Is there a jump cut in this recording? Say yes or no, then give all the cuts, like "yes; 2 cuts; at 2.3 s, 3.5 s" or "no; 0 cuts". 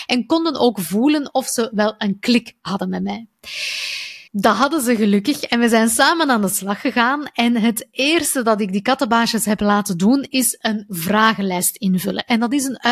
yes; 1 cut; at 4.3 s